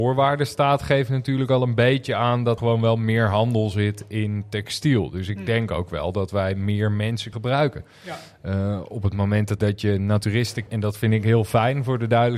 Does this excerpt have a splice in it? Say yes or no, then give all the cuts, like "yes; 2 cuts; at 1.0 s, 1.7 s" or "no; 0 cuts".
yes; 4 cuts; at 2.6 s, 7.3 s, 9.6 s, 10.7 s